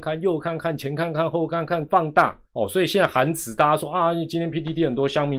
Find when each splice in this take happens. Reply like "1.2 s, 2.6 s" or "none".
1.9 s, 2.5 s